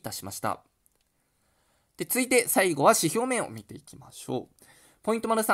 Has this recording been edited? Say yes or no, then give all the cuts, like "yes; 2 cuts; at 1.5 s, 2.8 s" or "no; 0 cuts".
no; 0 cuts